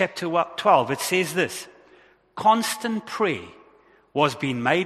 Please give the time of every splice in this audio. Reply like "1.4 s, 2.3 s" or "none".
none